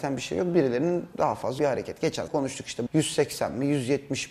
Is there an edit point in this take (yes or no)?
yes